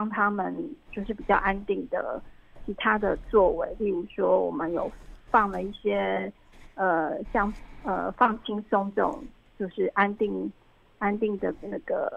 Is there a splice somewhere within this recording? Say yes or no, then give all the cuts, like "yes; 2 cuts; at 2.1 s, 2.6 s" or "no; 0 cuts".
no; 0 cuts